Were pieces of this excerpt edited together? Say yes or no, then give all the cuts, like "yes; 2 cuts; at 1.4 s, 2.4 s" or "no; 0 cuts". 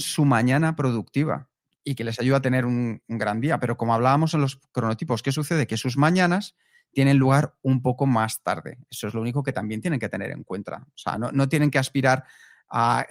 no; 0 cuts